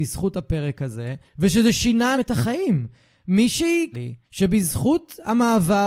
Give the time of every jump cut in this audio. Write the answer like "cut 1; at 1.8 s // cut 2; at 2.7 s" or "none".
cut 1; at 1.2 s // cut 2; at 2.1 s // cut 3; at 3.9 s // cut 4; at 4.2 s